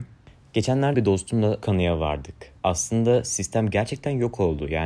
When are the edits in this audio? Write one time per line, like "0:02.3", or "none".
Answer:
0:00.9
0:01.6
0:02.6